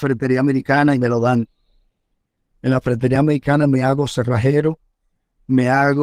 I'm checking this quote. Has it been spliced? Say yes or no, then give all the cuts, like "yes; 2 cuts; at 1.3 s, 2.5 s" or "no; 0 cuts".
no; 0 cuts